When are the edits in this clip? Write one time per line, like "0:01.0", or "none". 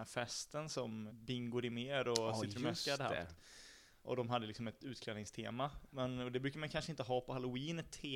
0:01.1